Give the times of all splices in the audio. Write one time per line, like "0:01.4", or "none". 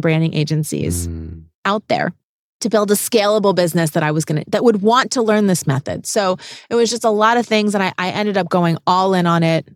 none